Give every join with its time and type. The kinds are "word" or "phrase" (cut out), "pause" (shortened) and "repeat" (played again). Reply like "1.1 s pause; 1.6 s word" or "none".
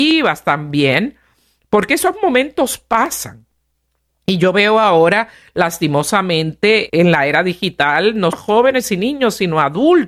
6.9 s word; 8.3 s word

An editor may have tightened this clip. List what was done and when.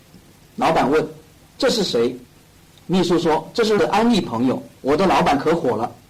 2.3 s pause; 3.8 s word; 4.8 s pause

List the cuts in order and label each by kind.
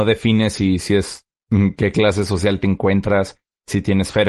none

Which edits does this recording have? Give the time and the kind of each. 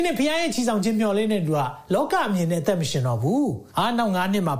3.7 s pause

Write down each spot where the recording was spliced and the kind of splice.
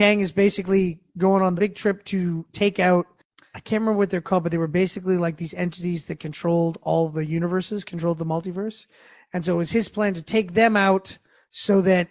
none

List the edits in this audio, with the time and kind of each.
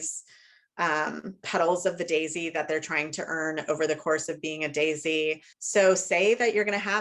1.4 s phrase; 5.5 s pause

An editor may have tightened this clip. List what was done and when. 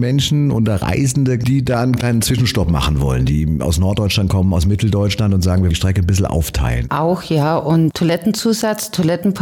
5.7 s word

